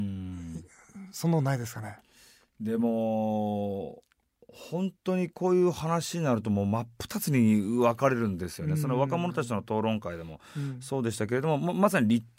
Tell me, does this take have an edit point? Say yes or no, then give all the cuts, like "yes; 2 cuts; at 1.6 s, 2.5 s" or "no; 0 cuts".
yes; 1 cut; at 5.0 s